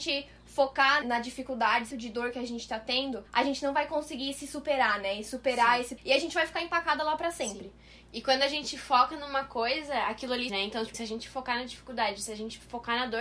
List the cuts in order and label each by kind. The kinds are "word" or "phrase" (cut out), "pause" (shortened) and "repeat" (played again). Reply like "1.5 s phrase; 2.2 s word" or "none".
1.0 s word; 1.9 s phrase; 3.3 s pause; 6.0 s word; 10.5 s word; 10.9 s word